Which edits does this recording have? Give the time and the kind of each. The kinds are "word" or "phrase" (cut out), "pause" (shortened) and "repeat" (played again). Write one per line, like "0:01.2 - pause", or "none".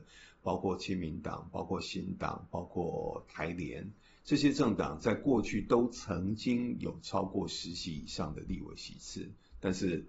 none